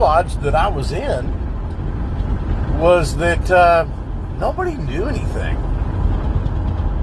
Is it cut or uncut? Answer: uncut